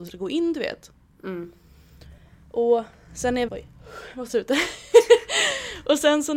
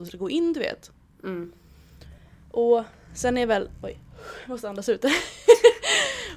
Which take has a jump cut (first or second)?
first